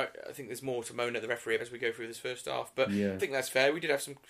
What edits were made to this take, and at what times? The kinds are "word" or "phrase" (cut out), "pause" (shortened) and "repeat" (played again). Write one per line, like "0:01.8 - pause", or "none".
0:01.6 - word
0:03.2 - phrase